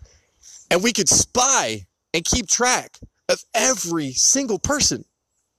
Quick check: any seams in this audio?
no; 0 cuts

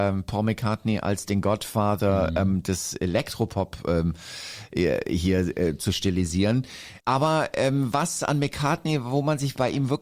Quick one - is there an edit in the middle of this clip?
yes; 1 cut; at 7.0 s

